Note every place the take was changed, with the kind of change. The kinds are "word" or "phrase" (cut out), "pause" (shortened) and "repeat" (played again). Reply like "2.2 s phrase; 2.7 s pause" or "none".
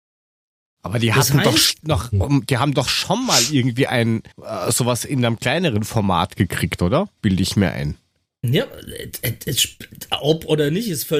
4.3 s pause; 7.2 s pause